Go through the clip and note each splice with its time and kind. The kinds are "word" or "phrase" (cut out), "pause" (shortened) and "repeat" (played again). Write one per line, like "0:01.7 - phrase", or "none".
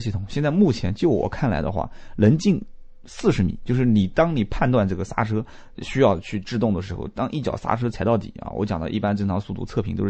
0:05.8 - word